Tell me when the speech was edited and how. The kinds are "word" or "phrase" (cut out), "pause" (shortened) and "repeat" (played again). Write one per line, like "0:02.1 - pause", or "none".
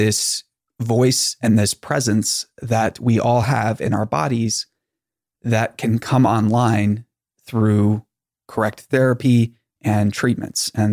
none